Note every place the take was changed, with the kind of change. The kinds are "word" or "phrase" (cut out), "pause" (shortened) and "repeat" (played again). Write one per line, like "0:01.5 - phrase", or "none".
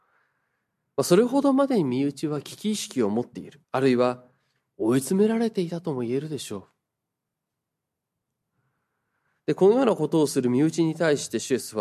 0:03.6 - pause